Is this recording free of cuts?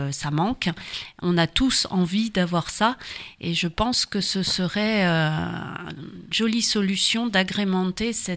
no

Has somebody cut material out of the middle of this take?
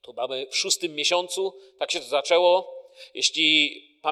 no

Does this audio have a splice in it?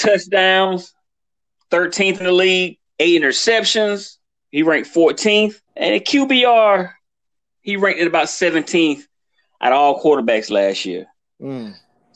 yes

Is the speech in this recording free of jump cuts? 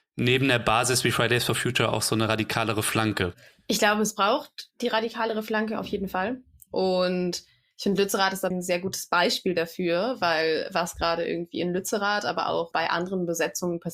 no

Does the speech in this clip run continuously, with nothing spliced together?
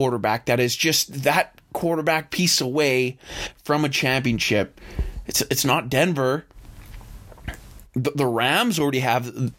yes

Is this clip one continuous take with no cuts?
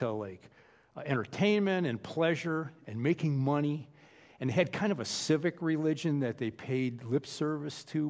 yes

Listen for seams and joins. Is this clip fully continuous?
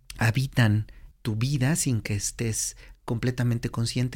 no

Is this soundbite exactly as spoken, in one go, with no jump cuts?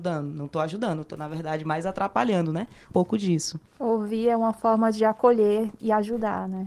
no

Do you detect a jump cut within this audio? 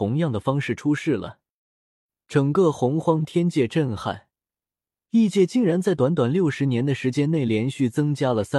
no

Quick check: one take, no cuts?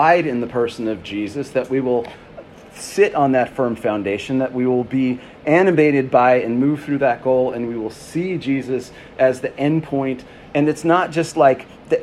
yes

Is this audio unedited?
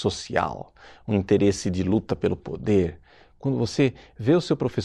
yes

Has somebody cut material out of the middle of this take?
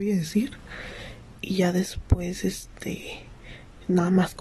no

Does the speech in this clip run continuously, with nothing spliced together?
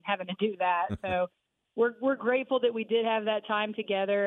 yes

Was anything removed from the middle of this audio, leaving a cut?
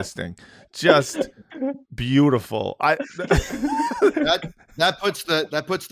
no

